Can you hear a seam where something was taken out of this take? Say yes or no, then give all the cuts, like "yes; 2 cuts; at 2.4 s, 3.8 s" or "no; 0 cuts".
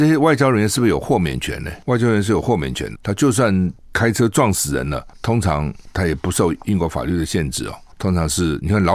yes; 2 cuts; at 1.8 s, 2.9 s